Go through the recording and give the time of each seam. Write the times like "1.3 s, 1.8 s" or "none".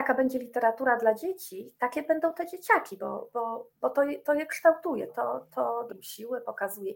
3.7 s, 5.1 s, 5.9 s